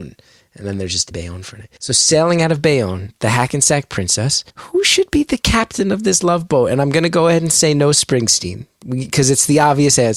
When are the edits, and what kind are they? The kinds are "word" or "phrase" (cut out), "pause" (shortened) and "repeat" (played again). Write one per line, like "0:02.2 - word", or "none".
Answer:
0:01.1 - word
0:01.8 - pause
0:04.5 - pause